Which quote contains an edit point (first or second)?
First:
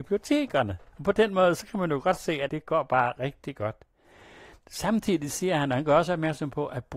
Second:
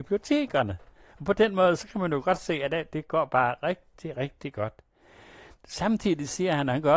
first